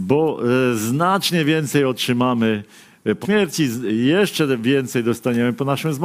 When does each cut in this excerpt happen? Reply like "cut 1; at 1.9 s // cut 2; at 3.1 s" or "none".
cut 1; at 3.2 s